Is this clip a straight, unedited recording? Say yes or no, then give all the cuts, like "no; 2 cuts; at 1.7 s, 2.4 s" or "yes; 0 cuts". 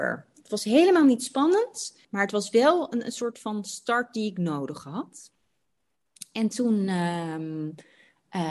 no; 1 cut; at 2.0 s